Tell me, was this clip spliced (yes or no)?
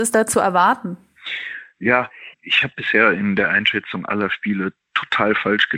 yes